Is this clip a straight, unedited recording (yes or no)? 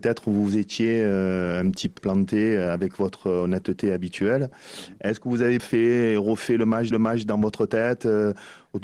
no